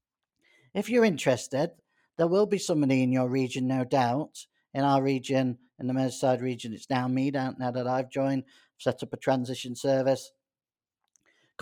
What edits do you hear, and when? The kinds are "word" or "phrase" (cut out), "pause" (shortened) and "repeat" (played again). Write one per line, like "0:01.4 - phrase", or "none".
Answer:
none